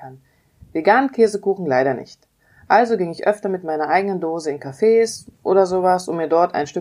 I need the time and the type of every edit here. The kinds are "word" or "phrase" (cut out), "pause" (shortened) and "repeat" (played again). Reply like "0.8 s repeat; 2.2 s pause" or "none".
none